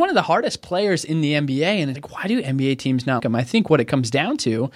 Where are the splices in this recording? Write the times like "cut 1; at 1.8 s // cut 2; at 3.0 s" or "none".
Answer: cut 1; at 1.9 s // cut 2; at 3.2 s